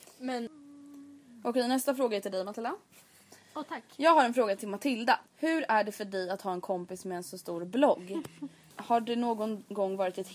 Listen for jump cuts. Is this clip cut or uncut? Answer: cut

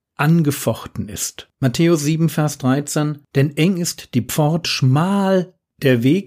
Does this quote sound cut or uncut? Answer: cut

